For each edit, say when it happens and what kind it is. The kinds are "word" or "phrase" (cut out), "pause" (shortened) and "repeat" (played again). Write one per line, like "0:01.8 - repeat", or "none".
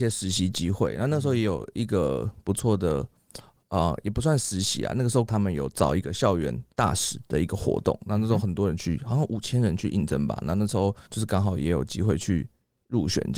0:05.3 - word
0:06.7 - pause
0:11.1 - pause